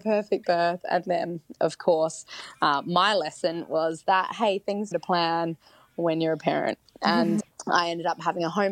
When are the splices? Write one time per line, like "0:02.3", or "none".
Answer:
0:04.9
0:07.4